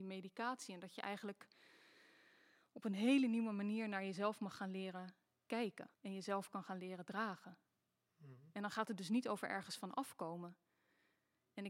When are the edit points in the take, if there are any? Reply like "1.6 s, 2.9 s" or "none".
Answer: 5.9 s